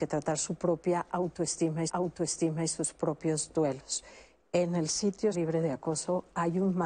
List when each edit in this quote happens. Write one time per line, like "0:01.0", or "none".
0:01.9
0:05.3